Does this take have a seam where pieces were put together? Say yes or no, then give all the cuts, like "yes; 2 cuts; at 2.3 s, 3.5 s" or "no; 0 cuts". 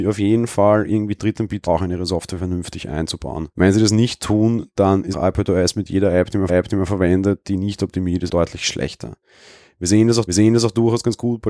yes; 6 cuts; at 1.7 s, 3.5 s, 5.1 s, 6.5 s, 8.3 s, 10.3 s